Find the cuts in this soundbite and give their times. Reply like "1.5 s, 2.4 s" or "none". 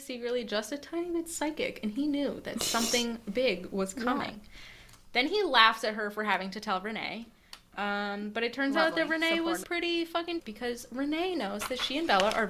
9.6 s, 10.4 s